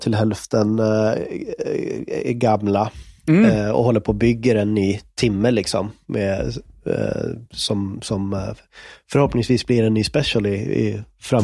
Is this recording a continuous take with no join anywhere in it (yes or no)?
yes